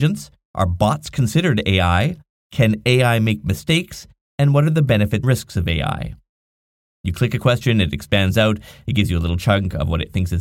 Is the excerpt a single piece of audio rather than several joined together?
no; 1 cut; at 5.2 s

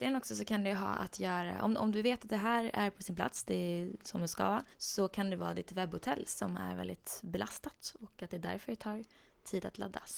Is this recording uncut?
no; 1 cut; at 4.7 s

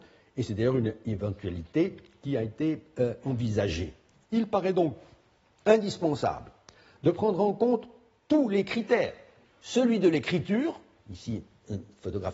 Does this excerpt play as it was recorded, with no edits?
yes; 0 cuts

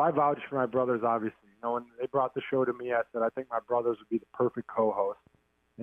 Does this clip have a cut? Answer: no; 0 cuts

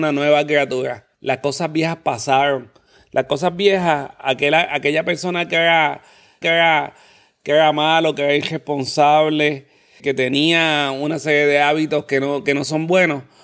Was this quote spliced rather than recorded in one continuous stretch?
yes; 3 cuts; at 1.1 s, 6.4 s, 10.0 s

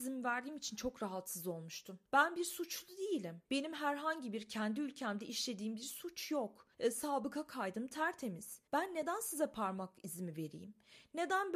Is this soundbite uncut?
no; 4 cuts; at 2.0 s, 3.4 s, 6.7 s, 8.7 s

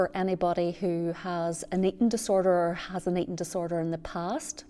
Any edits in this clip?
no; 0 cuts

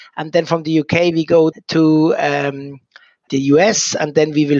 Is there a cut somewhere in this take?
yes; 2 cuts; at 1.5 s, 3.3 s

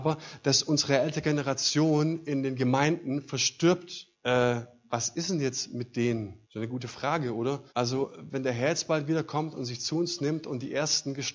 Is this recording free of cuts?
no; 3 cuts; at 4.1 s, 6.4 s, 7.7 s

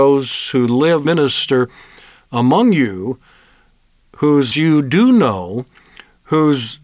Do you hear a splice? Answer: yes; 2 cuts; at 1.0 s, 4.5 s

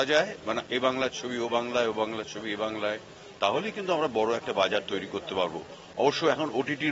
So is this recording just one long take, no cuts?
yes; 0 cuts

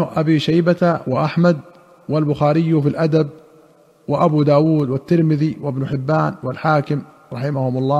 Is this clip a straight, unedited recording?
yes; 0 cuts

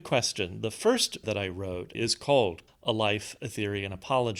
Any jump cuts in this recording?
yes; 3 cuts; at 1.2 s, 1.9 s, 2.7 s

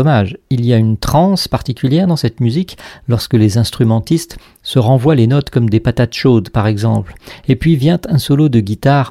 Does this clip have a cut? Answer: no; 0 cuts

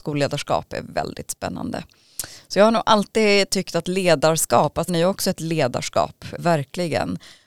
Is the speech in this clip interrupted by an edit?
yes; 2 cuts; at 4.9 s, 6.4 s

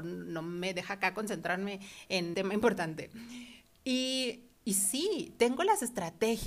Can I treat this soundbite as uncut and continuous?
no; 1 cut; at 2.3 s

